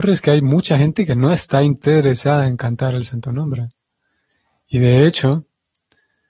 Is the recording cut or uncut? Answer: uncut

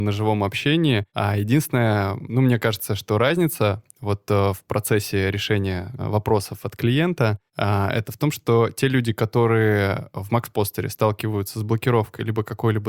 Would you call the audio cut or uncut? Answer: cut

